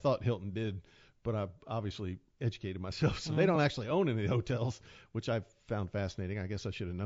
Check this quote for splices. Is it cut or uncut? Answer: uncut